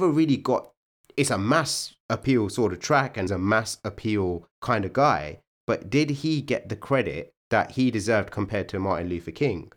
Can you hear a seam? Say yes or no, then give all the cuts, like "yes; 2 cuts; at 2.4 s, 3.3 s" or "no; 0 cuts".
yes; 3 cuts; at 3.3 s, 4.5 s, 7.4 s